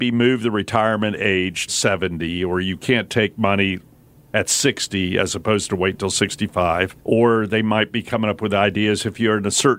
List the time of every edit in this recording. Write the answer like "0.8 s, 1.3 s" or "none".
1.7 s, 7.0 s